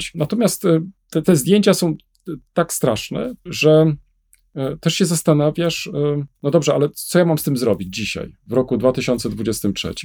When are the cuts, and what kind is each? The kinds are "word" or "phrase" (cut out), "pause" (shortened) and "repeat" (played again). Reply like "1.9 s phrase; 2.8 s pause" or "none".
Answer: 1.2 s word; 2.5 s word; 3.5 s word; 6.3 s pause